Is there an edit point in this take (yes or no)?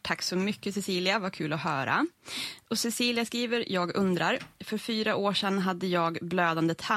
no